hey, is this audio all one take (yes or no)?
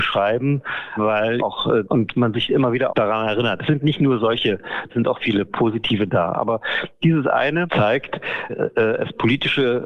no